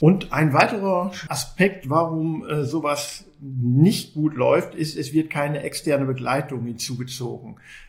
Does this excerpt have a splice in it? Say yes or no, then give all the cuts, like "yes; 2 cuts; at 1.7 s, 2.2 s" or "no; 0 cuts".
no; 0 cuts